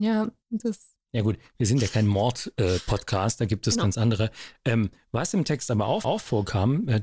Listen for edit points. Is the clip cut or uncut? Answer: cut